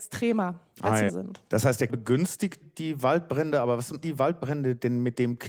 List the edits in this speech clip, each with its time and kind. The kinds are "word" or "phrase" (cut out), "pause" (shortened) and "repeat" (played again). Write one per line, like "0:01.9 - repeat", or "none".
0:01.1 - word
0:01.9 - word
0:02.6 - word
0:04.0 - word